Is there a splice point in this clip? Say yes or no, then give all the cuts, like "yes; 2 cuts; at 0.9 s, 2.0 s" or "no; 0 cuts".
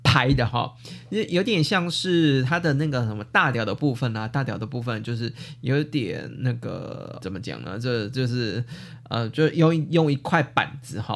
yes; 1 cut; at 7.2 s